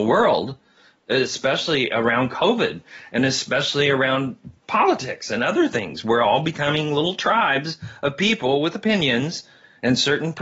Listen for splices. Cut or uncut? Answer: cut